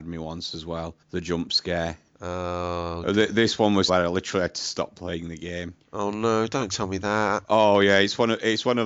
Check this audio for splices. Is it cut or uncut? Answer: cut